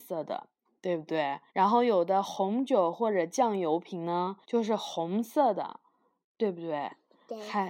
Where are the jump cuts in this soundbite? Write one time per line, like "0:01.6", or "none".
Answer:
0:01.5
0:04.4

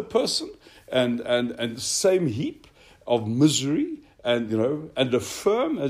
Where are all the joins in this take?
none

